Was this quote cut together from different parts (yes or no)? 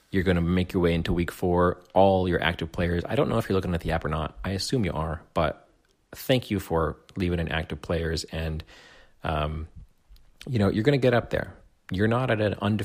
no